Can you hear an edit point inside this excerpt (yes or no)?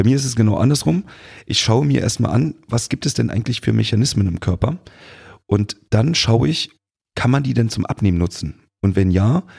no